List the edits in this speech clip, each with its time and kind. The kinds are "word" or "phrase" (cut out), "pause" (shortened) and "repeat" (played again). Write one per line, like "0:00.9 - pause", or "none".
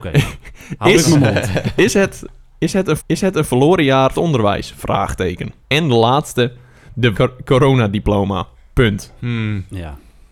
0:03.0 - repeat
0:04.1 - phrase
0:05.6 - pause
0:07.1 - phrase
0:08.5 - pause